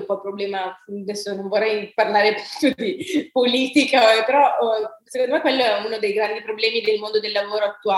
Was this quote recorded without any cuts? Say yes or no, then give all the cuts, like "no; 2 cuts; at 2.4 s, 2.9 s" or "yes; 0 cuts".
yes; 0 cuts